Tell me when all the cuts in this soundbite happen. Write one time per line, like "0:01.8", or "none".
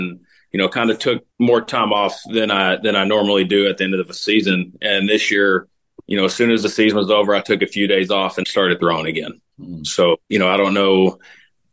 0:01.3
0:08.4
0:09.5
0:10.2